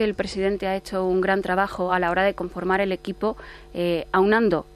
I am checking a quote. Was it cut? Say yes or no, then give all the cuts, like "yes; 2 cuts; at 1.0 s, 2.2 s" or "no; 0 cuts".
no; 0 cuts